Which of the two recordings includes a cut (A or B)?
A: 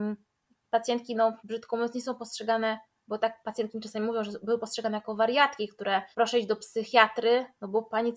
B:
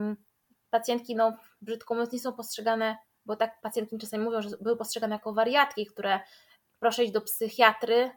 A